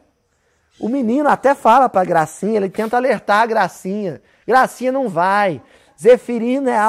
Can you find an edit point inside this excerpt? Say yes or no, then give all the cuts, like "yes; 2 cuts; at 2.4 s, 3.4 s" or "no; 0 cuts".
no; 0 cuts